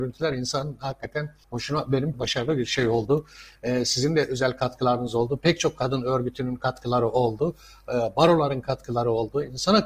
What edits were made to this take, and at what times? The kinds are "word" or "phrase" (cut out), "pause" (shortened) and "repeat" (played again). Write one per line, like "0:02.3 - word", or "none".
0:01.4 - pause
0:02.1 - phrase